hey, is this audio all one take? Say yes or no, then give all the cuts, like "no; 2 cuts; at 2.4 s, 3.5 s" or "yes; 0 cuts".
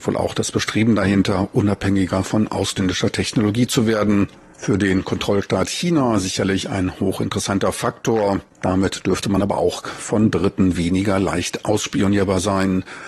yes; 0 cuts